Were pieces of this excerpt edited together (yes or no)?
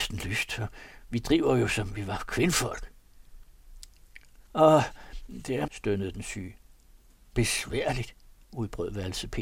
yes